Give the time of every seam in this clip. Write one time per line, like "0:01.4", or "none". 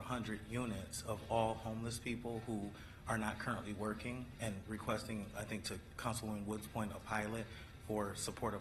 0:05.3
0:06.0